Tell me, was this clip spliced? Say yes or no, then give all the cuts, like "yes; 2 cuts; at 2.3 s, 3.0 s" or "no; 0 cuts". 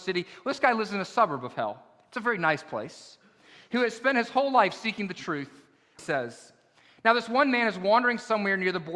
yes; 1 cut; at 6.0 s